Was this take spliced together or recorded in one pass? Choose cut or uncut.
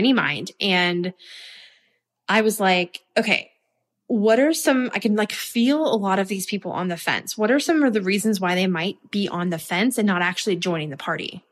uncut